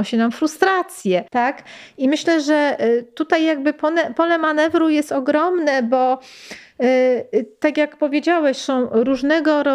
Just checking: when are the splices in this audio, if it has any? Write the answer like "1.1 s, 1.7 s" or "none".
1.3 s